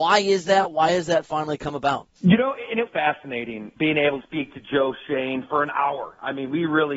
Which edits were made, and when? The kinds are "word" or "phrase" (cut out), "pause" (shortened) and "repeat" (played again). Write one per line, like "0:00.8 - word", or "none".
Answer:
0:02.2 - pause
0:02.9 - word
0:03.8 - word
0:04.2 - word
0:05.5 - word